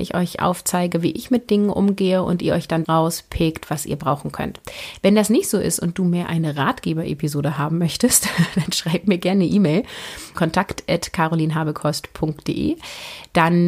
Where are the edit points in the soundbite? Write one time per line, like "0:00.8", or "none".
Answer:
0:02.8
0:10.3